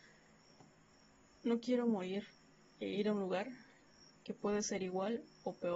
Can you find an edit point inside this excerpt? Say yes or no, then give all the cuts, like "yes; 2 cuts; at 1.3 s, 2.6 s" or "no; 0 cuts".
no; 0 cuts